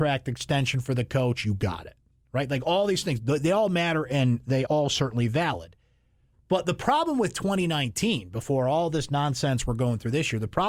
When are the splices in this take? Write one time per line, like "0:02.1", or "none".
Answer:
0:04.7